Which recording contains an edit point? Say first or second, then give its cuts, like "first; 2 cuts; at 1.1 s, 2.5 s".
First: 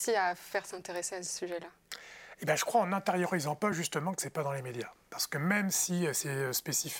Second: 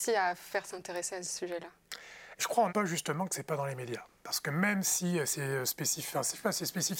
second; 2 cuts; at 2.4 s, 2.7 s